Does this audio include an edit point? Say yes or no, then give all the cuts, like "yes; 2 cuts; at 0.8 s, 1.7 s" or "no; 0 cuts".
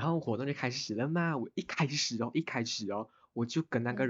no; 0 cuts